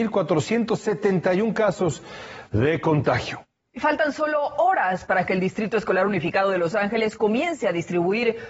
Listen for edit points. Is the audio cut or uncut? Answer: uncut